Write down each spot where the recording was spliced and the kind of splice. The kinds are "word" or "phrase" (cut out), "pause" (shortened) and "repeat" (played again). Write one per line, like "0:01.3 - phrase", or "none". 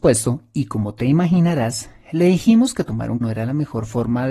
0:03.2 - word

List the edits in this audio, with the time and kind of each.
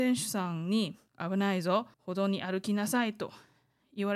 0:01.1 - pause
0:01.9 - pause

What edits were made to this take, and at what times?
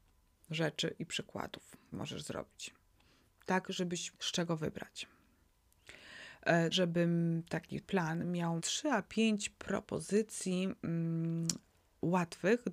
0:01.9 - word
0:04.1 - word
0:06.7 - word
0:07.8 - word
0:08.6 - word

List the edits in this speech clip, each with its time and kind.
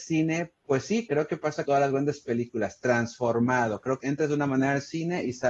0:01.1 - word
0:01.6 - word
0:04.0 - phrase

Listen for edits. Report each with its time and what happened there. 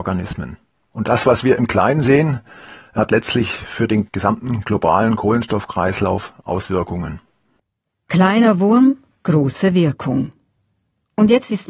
none

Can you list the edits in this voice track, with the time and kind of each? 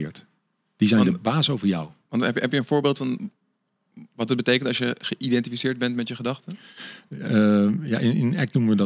none

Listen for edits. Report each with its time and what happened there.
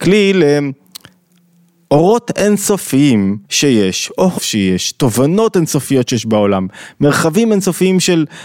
0:03.4 - pause
0:04.4 - word

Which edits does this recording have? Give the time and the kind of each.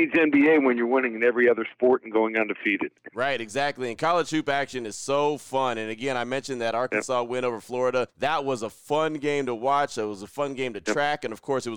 0:08.1 - pause

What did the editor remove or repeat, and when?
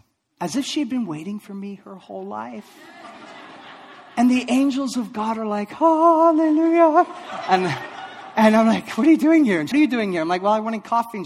0:09.7 - phrase

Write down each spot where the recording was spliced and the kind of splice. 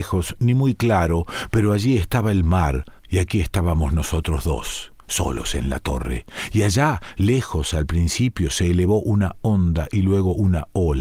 0:03.0 - pause

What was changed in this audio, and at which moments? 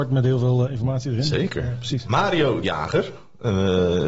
0:02.6 - word

